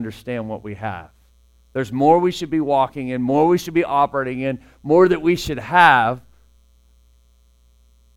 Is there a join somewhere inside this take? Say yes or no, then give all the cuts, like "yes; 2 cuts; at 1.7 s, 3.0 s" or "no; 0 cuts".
no; 0 cuts